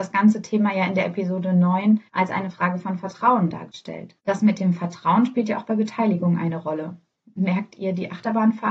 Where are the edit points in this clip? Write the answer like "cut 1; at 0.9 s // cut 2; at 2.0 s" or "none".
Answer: cut 1; at 2.1 s // cut 2; at 4.2 s